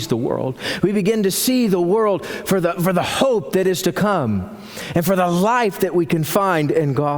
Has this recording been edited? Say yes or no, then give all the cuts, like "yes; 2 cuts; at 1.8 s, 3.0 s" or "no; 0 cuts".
no; 0 cuts